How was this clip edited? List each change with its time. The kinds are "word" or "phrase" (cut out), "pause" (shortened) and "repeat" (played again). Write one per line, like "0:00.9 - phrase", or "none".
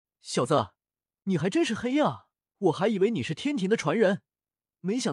0:02.4 - pause

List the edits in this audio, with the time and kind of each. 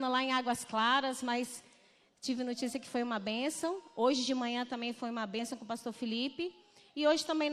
none

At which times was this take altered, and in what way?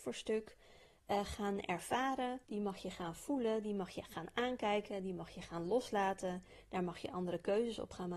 0:02.4 - pause

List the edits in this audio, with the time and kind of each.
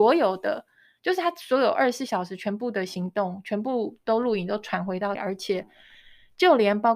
0:05.1 - word

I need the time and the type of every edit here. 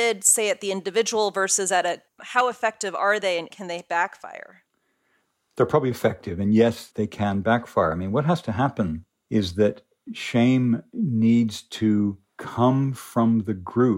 0:02.1 - word
0:03.5 - word
0:05.9 - word
0:06.9 - word

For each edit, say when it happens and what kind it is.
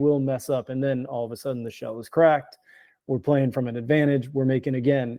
none

